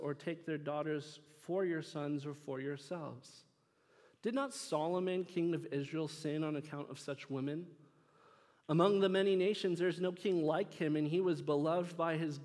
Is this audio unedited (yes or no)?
yes